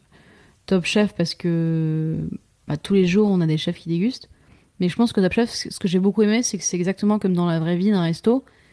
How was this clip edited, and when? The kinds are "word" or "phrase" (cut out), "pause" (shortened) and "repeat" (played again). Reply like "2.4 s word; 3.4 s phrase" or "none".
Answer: none